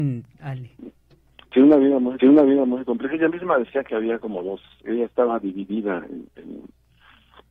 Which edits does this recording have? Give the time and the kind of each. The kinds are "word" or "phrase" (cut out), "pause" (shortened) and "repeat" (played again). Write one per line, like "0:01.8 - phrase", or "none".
0:02.2 - repeat
0:04.8 - word